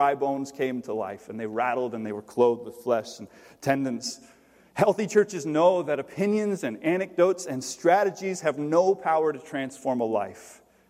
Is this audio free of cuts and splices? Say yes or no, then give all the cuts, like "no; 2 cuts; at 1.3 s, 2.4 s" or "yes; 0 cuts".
yes; 0 cuts